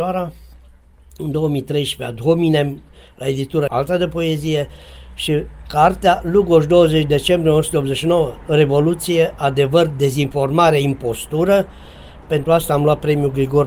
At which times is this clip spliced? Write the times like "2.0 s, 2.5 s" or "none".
3.7 s